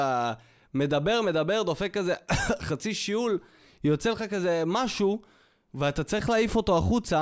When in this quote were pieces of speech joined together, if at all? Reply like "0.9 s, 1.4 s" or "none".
none